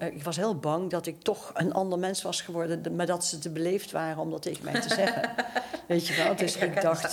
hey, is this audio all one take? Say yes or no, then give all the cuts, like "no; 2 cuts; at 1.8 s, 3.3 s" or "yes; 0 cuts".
yes; 0 cuts